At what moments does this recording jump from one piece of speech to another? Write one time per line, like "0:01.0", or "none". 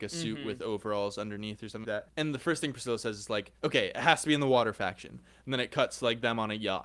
0:01.8
0:03.6